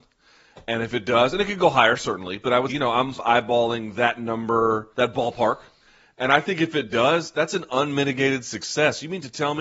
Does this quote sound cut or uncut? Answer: cut